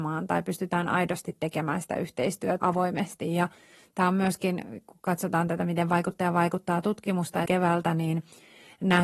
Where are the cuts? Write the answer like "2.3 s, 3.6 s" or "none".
2.6 s, 7.5 s